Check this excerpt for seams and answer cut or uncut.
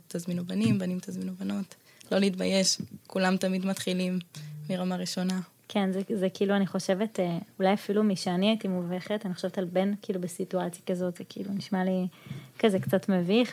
uncut